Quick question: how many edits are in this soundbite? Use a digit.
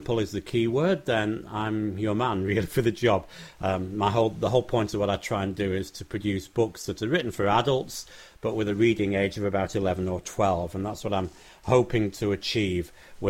0